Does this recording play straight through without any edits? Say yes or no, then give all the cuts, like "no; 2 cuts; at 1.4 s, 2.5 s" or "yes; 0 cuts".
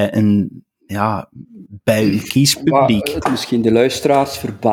no; 1 cut; at 3.2 s